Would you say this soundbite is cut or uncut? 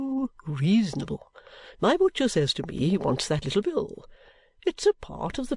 uncut